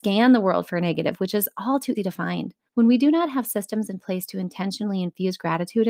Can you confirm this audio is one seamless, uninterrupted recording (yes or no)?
no